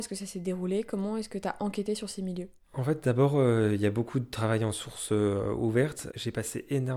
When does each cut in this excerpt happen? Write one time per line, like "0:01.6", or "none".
none

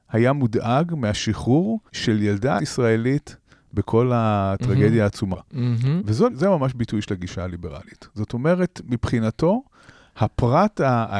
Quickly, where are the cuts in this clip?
0:01.9
0:02.6
0:05.3
0:06.3

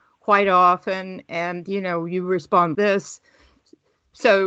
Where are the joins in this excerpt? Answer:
0:02.7

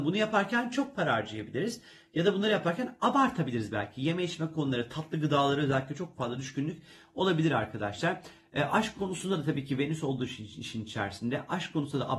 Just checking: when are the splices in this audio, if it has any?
none

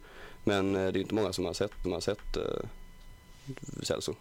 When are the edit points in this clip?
0:01.8

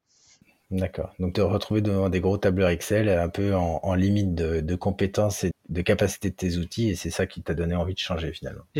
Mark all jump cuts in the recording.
0:01.3
0:05.5

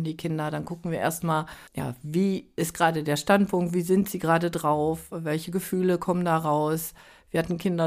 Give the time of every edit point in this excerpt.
0:01.7

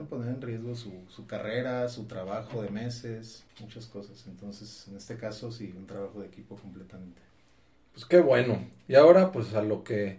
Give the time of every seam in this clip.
0:03.5

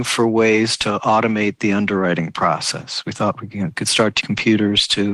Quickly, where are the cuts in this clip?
0:04.2

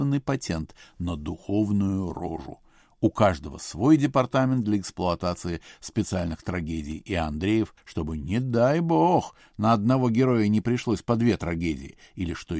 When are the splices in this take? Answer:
0:07.8

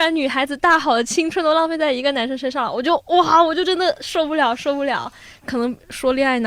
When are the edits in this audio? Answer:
none

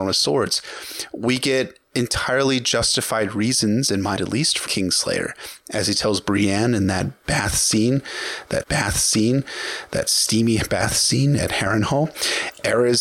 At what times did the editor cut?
0:04.2
0:04.7
0:08.6

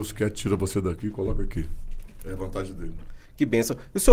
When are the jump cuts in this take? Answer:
none

